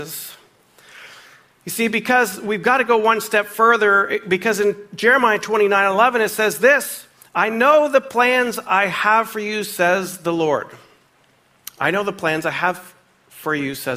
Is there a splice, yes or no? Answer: no